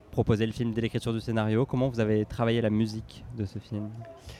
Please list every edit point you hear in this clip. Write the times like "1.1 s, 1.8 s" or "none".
none

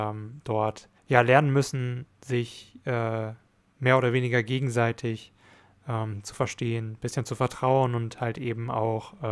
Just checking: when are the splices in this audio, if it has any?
1.0 s

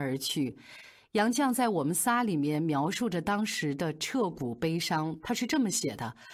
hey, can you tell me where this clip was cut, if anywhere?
none

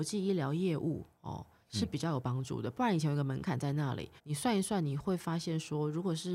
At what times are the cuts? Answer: 4.2 s

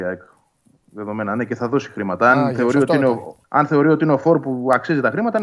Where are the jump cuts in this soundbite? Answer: 3.4 s

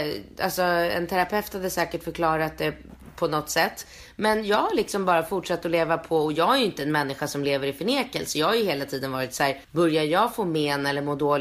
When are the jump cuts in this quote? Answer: 9.6 s

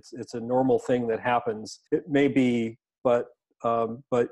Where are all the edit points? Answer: 1.9 s, 2.9 s

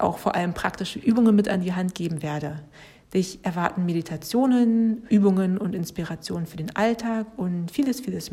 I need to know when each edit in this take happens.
none

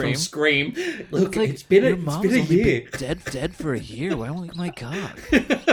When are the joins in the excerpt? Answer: 3.2 s, 4.5 s

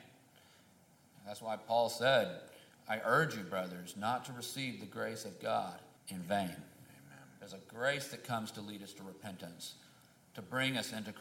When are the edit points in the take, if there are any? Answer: 6.0 s

